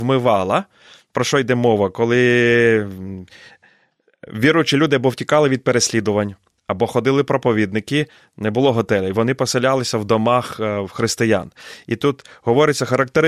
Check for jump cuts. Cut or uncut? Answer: uncut